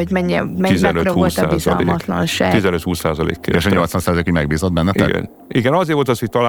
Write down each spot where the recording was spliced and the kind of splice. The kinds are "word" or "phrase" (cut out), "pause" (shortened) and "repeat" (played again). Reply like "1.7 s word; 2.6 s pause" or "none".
none